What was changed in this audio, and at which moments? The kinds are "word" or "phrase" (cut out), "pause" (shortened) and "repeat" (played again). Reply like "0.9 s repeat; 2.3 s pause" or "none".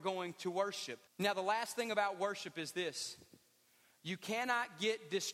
1.1 s pause